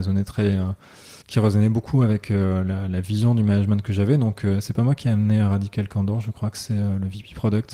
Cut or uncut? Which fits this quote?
cut